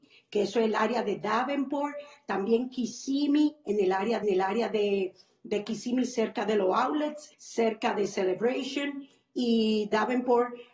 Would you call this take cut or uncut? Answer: cut